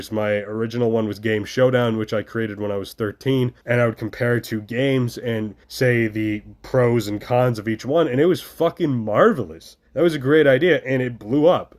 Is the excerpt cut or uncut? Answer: cut